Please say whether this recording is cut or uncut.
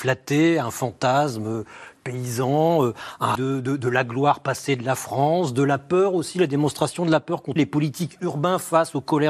cut